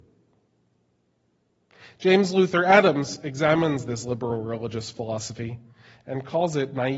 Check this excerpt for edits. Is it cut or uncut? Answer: uncut